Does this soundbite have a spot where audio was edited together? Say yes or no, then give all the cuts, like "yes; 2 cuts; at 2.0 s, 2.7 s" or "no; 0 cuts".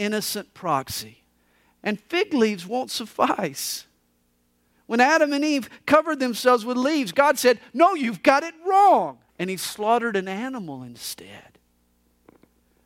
yes; 2 cuts; at 1.4 s, 9.3 s